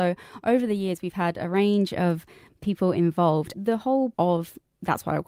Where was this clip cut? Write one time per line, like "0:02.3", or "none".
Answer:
0:04.1